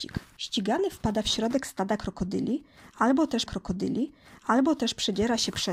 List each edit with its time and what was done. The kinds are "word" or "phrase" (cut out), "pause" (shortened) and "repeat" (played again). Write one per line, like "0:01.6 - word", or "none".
0:03.5 - repeat

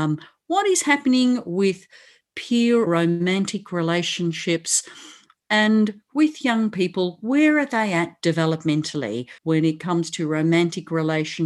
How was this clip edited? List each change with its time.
0:02.9 - word
0:09.4 - pause

